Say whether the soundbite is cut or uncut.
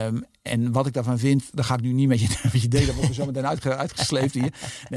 uncut